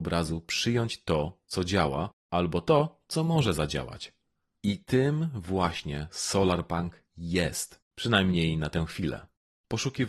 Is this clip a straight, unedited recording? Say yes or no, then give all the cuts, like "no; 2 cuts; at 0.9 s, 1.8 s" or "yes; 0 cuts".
no; 1 cut; at 7.8 s